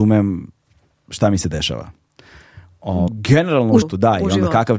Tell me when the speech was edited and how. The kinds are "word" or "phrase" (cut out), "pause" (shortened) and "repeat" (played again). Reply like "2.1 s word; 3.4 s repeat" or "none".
3.1 s word; 3.8 s word

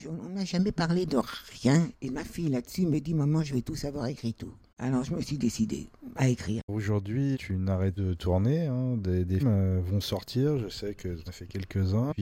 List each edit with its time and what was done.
7.3 s word; 8.0 s word; 9.4 s word; 11.3 s word

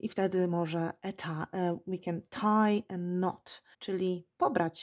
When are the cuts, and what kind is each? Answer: 3.7 s pause

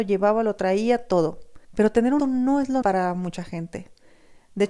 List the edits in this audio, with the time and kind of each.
1.6 s pause; 2.2 s word; 2.8 s word

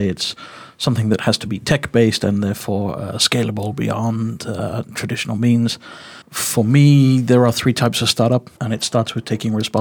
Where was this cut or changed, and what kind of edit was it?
6.2 s pause; 8.6 s pause

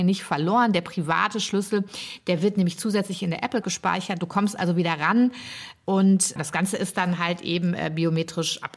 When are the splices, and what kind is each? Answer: 3.6 s word

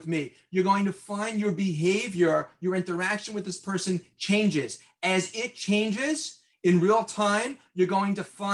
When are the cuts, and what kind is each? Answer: none

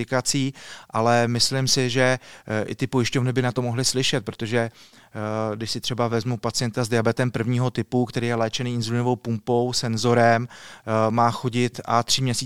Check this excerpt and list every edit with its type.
none

